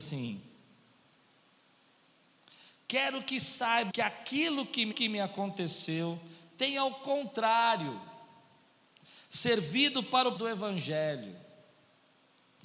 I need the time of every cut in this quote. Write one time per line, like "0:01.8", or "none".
0:03.9
0:04.9
0:10.4